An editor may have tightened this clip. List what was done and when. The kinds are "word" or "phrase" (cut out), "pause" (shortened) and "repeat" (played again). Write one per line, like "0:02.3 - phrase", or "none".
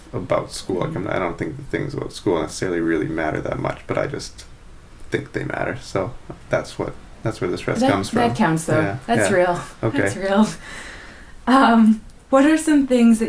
none